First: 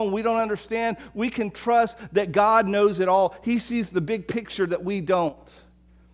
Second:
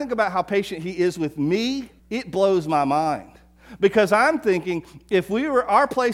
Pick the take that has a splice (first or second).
second